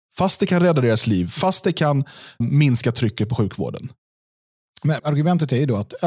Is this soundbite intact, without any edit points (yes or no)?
no